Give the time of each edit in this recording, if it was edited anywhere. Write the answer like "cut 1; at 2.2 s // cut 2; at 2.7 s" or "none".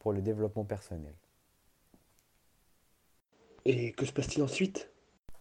none